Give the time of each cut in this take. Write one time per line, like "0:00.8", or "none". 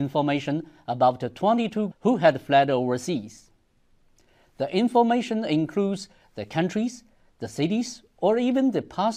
0:01.9